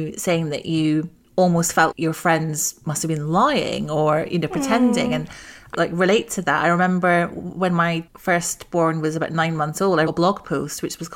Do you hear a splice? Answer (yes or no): yes